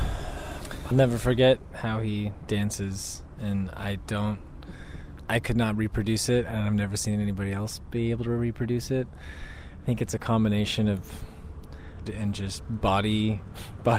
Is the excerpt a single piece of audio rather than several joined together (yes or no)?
no